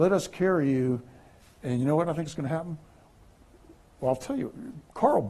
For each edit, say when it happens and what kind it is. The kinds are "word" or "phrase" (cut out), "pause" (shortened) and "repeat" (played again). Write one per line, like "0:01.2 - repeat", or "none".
none